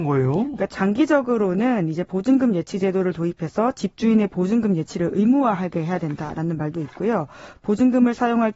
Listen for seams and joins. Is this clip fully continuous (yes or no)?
yes